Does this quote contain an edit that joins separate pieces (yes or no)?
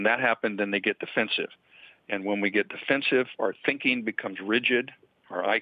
no